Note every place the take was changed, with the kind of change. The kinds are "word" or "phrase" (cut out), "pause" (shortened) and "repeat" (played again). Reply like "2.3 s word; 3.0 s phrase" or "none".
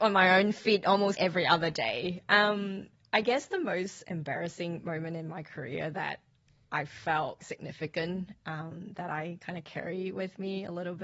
1.1 s word; 7.4 s word